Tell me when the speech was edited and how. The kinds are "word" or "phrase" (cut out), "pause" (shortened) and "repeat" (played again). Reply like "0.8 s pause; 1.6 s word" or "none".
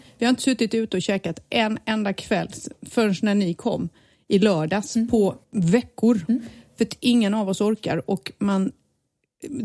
5.4 s pause